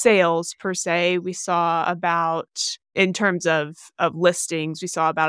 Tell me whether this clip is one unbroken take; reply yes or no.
no